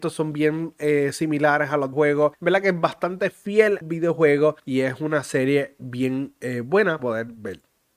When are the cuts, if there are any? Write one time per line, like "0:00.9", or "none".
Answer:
0:01.9
0:02.3
0:03.8
0:04.6
0:07.0

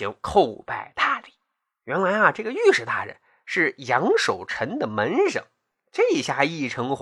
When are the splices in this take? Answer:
none

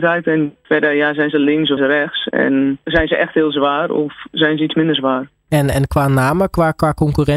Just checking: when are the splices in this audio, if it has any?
0:01.8
0:02.8

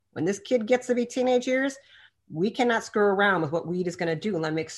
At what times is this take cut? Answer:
none

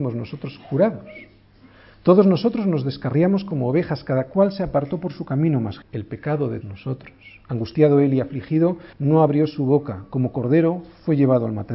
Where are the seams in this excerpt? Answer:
0:05.8
0:06.6
0:08.9

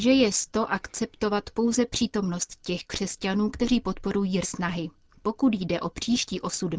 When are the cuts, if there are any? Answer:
0:04.4

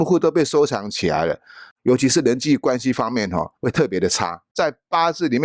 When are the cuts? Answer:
0:03.6

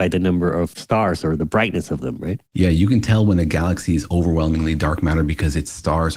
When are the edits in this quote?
none

